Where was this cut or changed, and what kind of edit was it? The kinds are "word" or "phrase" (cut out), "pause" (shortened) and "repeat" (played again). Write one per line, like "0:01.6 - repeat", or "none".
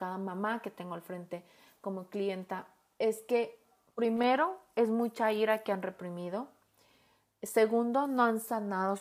none